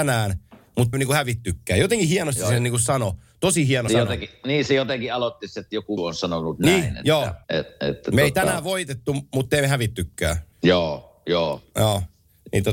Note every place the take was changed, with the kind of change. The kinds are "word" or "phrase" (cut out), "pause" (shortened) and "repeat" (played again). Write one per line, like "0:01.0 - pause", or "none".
0:00.9 - word
0:03.9 - word
0:06.0 - word
0:07.4 - pause
0:10.5 - pause